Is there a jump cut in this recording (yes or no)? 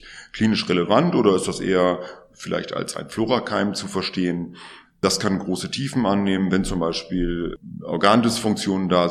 no